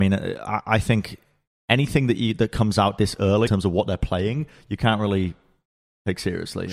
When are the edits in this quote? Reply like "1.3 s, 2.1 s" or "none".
3.5 s